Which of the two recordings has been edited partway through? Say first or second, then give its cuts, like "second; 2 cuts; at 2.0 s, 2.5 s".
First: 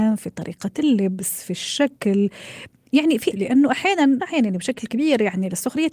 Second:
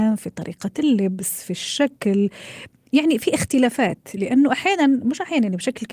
first; 2 cuts; at 3.3 s, 4.2 s